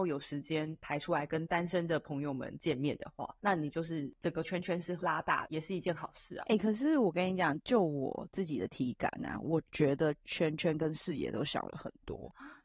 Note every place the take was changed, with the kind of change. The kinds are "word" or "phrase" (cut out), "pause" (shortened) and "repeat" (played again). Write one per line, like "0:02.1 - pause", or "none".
0:03.4 - pause

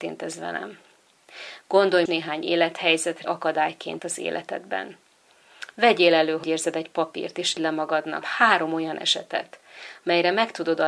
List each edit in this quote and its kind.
0:02.1 - word
0:03.2 - word
0:04.0 - word
0:06.4 - word
0:07.6 - word
0:08.2 - word

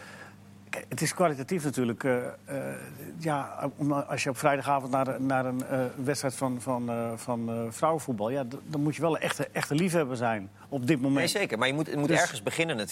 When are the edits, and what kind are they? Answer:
none

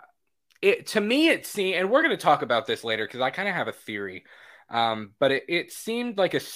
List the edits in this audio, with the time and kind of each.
none

